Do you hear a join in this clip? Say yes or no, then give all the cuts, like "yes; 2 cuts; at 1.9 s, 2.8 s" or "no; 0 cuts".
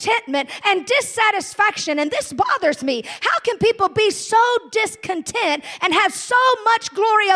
no; 0 cuts